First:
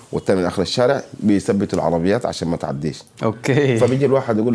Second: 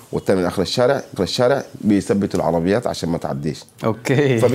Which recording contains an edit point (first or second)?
second